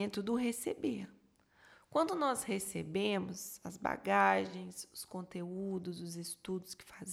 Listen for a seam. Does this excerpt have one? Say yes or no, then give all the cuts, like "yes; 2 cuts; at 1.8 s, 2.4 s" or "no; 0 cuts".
no; 0 cuts